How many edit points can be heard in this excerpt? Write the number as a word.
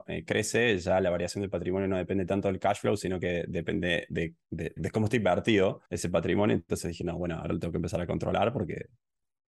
two